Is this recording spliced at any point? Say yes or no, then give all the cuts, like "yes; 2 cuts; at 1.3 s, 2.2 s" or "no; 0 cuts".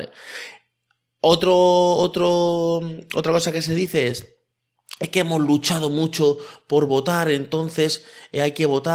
no; 0 cuts